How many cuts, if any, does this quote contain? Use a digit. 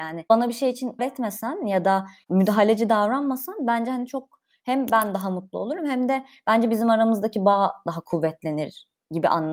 1